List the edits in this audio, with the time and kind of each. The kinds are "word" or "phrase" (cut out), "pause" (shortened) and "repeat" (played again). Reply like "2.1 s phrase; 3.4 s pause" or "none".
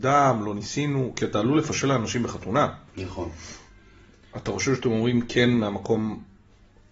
none